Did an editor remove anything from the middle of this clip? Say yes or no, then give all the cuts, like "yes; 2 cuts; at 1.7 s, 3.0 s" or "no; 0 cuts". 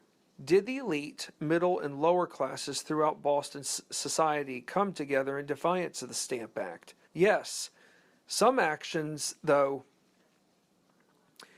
yes; 1 cut; at 7.0 s